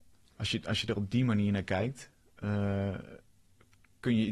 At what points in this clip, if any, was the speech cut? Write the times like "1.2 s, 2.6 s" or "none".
none